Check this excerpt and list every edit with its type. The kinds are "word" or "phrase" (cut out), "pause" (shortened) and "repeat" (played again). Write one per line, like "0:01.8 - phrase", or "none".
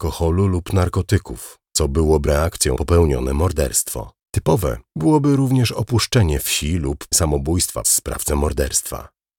0:02.3 - word
0:02.8 - word
0:04.2 - pause
0:07.1 - word
0:07.8 - word